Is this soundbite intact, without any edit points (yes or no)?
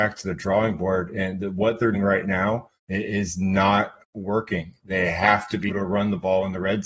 no